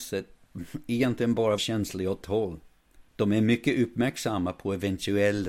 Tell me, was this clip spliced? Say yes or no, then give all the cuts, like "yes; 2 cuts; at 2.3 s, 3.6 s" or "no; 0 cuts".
yes; 3 cuts; at 1.6 s, 2.2 s, 3.1 s